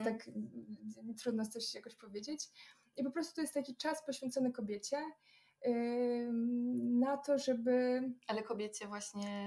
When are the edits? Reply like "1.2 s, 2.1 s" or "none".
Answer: none